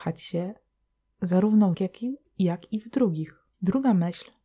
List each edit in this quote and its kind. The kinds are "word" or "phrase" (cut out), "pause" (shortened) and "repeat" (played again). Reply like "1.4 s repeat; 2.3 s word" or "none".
1.7 s word; 3.5 s pause

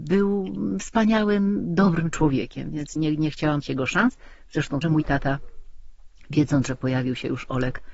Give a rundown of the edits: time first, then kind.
3.0 s word; 3.6 s word; 4.8 s word

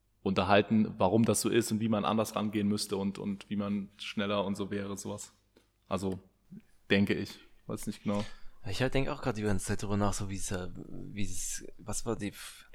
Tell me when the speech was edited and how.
none

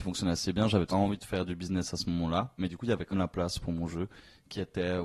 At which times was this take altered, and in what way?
0.9 s phrase; 3.1 s word

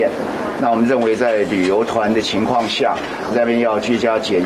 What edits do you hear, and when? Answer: 3.3 s word

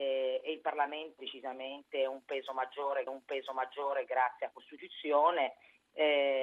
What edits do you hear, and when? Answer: 1.2 s phrase; 3.1 s repeat; 4.5 s word

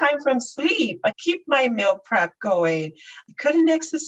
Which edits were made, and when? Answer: 1.1 s word

